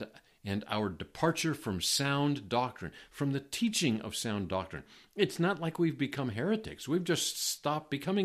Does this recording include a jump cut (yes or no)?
no